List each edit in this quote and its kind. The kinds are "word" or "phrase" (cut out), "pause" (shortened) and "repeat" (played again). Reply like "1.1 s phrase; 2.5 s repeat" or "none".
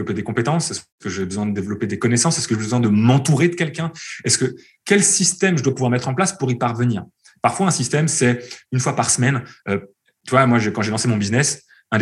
none